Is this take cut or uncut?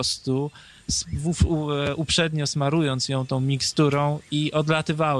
uncut